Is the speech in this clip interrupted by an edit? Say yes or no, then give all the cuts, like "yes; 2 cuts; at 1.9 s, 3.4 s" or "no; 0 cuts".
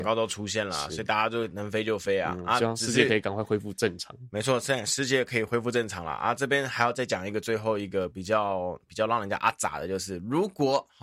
no; 0 cuts